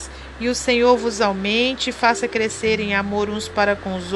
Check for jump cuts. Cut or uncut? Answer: uncut